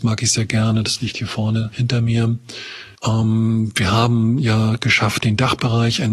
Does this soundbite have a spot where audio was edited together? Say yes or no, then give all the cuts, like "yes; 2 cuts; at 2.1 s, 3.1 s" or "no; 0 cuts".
yes; 1 cut; at 3.0 s